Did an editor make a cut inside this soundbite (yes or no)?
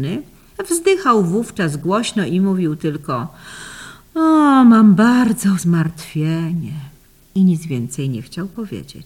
yes